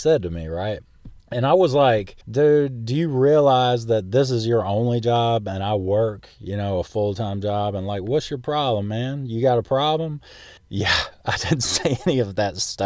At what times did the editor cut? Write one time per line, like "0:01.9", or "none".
0:01.2
0:02.2
0:10.6